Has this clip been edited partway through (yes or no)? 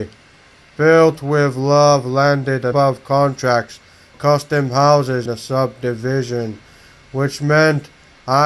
yes